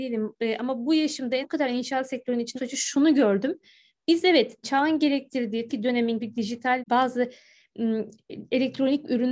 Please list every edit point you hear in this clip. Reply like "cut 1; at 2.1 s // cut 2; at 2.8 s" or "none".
cut 1; at 1.4 s // cut 2; at 2.6 s // cut 3; at 4.6 s // cut 4; at 5.7 s // cut 5; at 6.2 s // cut 6; at 6.8 s